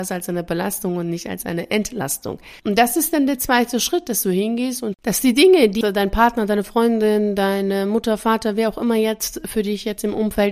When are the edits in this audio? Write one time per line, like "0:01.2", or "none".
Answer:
0:02.6
0:04.9
0:05.8

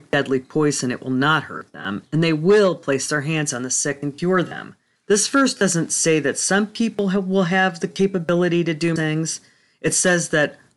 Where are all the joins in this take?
0:05.0
0:09.0

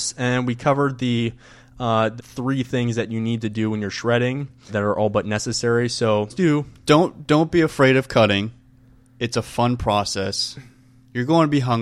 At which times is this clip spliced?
0:02.2
0:04.7
0:06.3

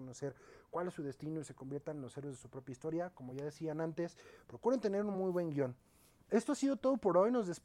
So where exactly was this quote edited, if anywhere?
none

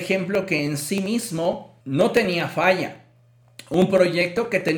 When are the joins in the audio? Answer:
0:01.8

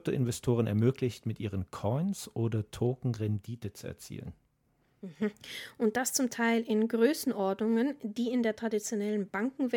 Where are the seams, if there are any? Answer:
none

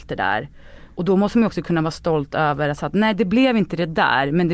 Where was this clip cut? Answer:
none

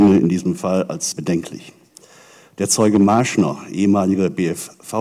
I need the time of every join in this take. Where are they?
0:01.1

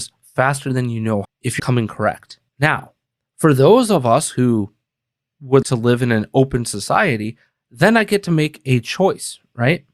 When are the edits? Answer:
0:01.2
0:01.6
0:02.5
0:05.6

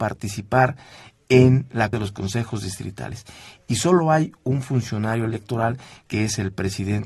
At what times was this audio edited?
0:01.9

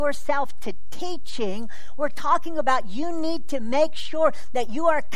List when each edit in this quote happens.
none

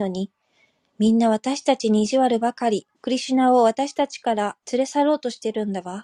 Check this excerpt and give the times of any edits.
0:02.9
0:04.6

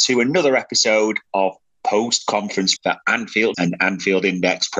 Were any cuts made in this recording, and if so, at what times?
0:02.8
0:03.5

